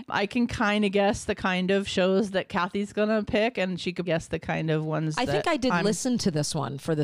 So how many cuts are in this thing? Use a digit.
1